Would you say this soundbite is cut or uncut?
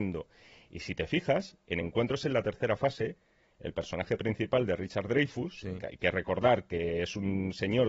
uncut